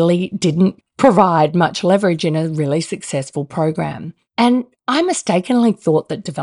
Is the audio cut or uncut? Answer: uncut